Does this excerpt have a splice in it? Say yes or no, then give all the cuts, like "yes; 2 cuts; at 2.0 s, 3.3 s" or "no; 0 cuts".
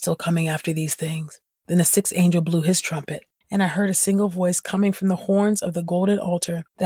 no; 0 cuts